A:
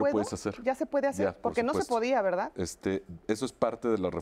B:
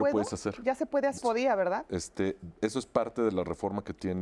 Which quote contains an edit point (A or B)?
B